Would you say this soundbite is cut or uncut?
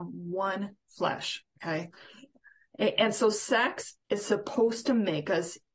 cut